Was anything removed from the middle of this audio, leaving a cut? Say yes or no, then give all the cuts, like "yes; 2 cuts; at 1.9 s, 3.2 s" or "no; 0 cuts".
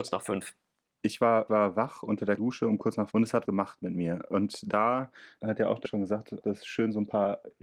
yes; 7 cuts; at 1.5 s, 2.4 s, 3.1 s, 3.4 s, 5.4 s, 5.8 s, 6.4 s